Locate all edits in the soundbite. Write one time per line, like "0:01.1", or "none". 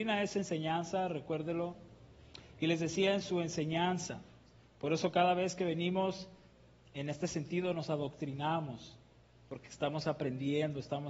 none